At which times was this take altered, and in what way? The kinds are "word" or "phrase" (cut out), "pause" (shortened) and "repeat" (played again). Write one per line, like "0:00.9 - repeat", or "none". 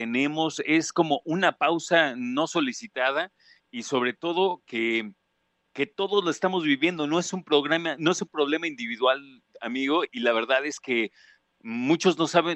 none